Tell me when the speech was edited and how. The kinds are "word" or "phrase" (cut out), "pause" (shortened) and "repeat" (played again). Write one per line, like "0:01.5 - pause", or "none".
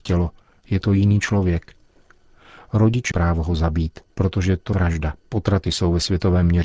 0:03.1 - word
0:04.1 - pause
0:04.7 - phrase
0:05.2 - pause